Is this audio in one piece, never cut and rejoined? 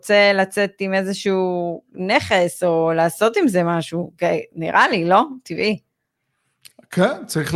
yes; 0 cuts

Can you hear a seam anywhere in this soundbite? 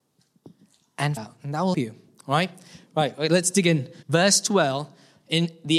yes; 3 cuts; at 1.2 s, 1.7 s, 4.0 s

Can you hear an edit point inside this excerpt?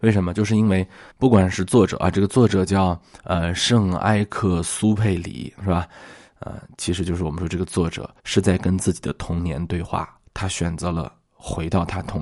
yes; 2 cuts; at 1.1 s, 8.2 s

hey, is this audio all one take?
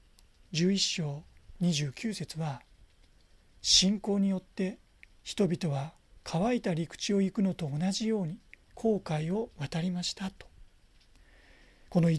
yes; 0 cuts

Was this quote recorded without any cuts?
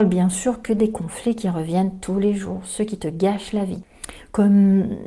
yes; 0 cuts

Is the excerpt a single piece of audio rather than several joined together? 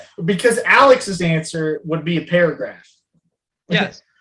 yes; 0 cuts

